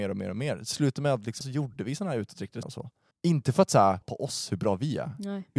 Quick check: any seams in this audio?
yes; 4 cuts; at 1.4 s, 2.6 s, 3.1 s, 4.0 s

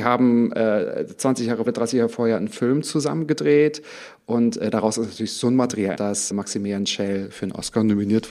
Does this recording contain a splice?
yes; 3 cuts; at 1.7 s, 6.0 s, 6.3 s

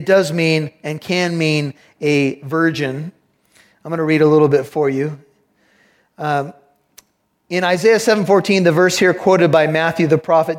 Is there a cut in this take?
no; 0 cuts

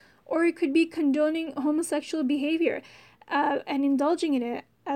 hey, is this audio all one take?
yes; 0 cuts

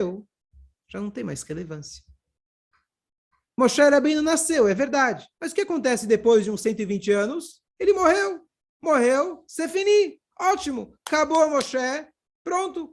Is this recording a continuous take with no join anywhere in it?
no; 2 cuts; at 5.3 s, 7.7 s

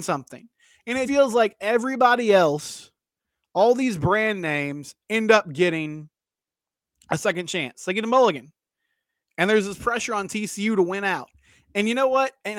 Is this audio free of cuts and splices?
no; 1 cut; at 1.0 s

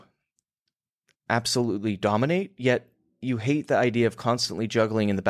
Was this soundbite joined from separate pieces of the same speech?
yes; 1 cut; at 3.1 s

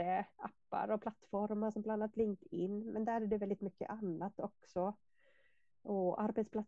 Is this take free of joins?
yes; 0 cuts

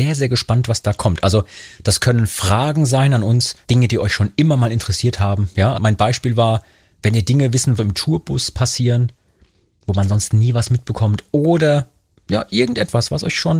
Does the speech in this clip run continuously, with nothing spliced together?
no; 3 cuts; at 3.6 s, 5.7 s, 7.8 s

